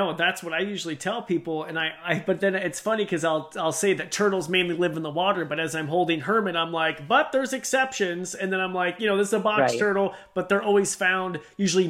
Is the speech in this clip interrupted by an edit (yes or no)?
no